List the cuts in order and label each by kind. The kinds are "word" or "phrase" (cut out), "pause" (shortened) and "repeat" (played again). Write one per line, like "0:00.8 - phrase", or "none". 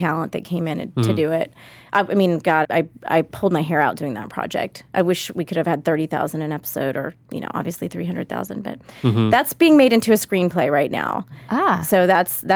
0:02.6 - word